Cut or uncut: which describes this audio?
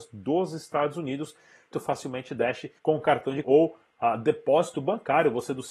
cut